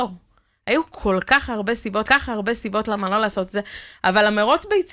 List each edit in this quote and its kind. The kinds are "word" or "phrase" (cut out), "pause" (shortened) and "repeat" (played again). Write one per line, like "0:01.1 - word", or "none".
0:02.0 - repeat